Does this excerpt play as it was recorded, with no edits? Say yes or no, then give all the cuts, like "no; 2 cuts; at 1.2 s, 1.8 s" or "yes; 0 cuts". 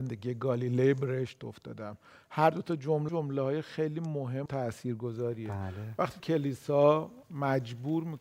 no; 3 cuts; at 3.1 s, 4.5 s, 6.2 s